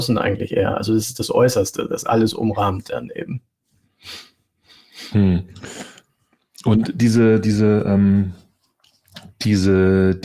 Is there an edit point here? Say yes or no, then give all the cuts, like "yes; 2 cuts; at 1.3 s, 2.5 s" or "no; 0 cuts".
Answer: no; 0 cuts